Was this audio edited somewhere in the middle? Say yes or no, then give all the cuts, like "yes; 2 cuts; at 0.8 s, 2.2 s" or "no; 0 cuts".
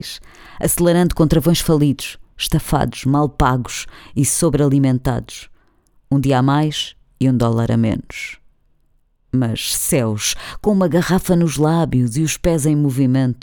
no; 0 cuts